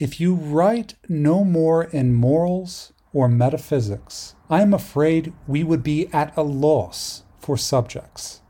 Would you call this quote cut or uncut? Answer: cut